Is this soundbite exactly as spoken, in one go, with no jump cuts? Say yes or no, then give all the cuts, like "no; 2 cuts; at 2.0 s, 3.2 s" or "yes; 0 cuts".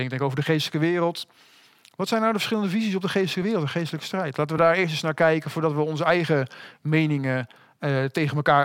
yes; 0 cuts